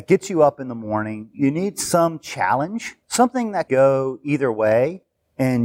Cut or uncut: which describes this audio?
cut